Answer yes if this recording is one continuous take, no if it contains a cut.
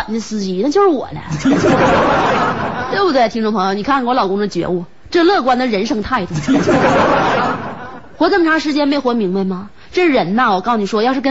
yes